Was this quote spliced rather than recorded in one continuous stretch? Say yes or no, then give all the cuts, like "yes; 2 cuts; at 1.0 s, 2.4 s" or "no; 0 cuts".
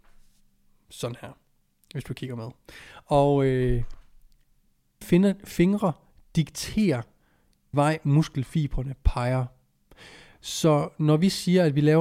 yes; 2 cuts; at 5.0 s, 7.7 s